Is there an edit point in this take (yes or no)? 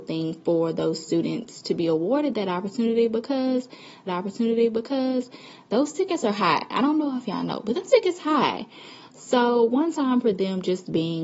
yes